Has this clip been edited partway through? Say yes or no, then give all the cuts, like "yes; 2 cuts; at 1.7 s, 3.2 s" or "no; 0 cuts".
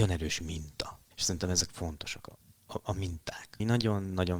yes; 1 cut; at 1.1 s